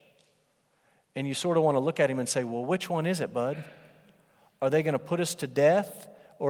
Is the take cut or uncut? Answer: uncut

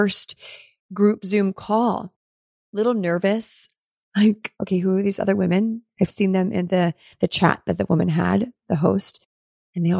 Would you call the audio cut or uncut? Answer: cut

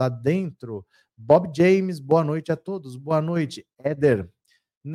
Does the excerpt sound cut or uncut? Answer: uncut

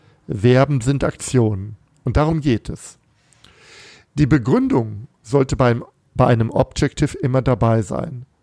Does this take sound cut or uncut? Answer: uncut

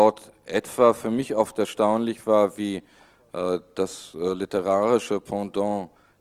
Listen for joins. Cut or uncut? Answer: uncut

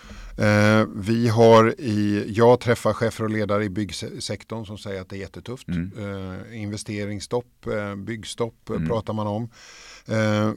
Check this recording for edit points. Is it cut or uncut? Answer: uncut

